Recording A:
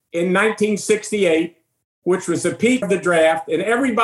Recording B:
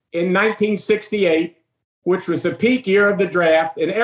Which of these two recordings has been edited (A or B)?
A